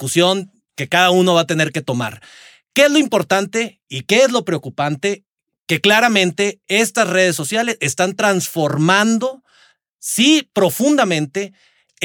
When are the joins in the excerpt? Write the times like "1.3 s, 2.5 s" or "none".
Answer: none